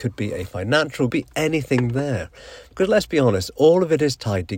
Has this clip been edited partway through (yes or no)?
yes